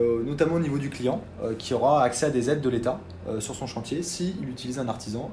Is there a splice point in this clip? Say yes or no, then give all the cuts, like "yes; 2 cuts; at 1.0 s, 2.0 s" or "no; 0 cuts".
no; 0 cuts